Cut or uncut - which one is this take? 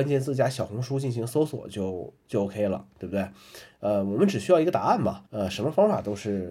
cut